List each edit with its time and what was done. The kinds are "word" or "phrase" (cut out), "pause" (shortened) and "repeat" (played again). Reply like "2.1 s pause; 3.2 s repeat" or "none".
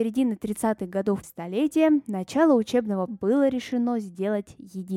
1.2 s word; 3.1 s word